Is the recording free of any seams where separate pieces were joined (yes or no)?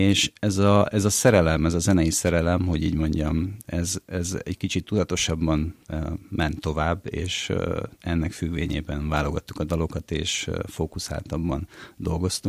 no